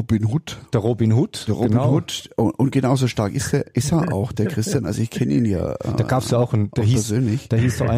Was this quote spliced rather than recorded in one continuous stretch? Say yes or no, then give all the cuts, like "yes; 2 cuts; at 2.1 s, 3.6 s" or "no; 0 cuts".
no; 0 cuts